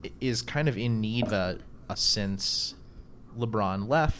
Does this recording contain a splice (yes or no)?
yes